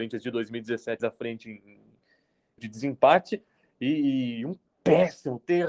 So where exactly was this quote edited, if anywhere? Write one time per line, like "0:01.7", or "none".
0:01.0
0:02.6

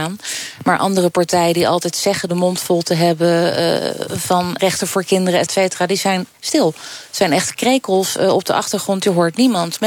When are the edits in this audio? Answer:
0:04.6
0:05.5

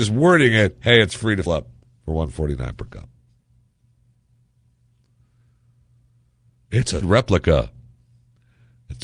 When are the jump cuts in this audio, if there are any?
0:01.5
0:07.0

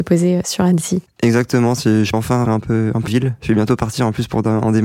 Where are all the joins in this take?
0:02.1
0:02.5
0:03.1

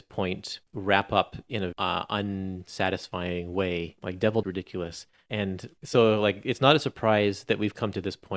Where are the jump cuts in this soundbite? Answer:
0:01.7
0:04.4

